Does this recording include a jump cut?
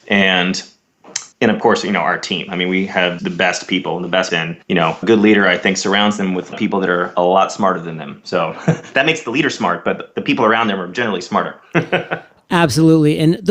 yes; 6 cuts; at 1.3 s, 3.2 s, 4.3 s, 4.6 s, 5.0 s, 6.5 s

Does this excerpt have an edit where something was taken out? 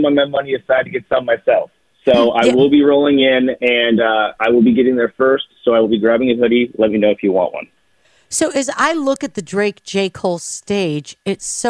no; 0 cuts

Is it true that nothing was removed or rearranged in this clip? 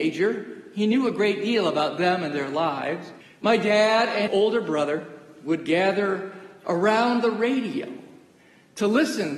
no; 2 cuts; at 3.2 s, 4.3 s

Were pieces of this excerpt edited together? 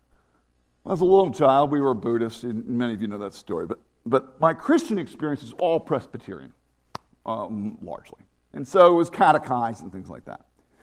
no; 0 cuts

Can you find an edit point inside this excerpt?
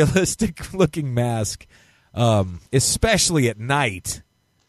yes; 1 cut; at 2.7 s

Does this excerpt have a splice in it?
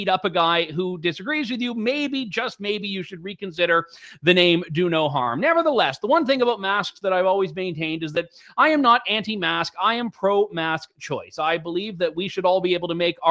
no; 0 cuts

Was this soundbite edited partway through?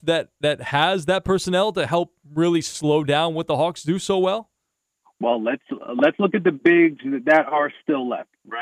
yes; 1 cut; at 4.8 s

